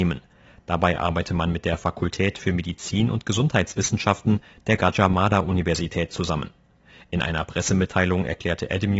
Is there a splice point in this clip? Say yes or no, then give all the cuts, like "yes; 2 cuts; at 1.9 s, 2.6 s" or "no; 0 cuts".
no; 0 cuts